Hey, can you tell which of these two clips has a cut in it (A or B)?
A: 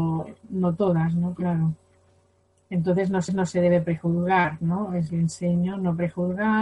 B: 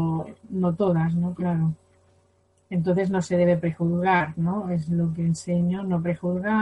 A